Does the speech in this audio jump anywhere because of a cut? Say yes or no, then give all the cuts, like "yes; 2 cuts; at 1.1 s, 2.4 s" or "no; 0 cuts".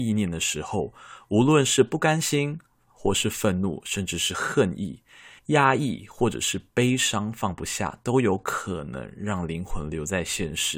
yes; 1 cut; at 5.4 s